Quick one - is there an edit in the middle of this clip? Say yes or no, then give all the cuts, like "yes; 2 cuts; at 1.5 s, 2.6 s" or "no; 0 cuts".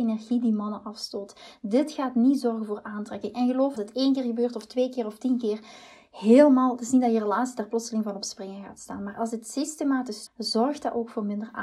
yes; 2 cuts; at 3.8 s, 10.3 s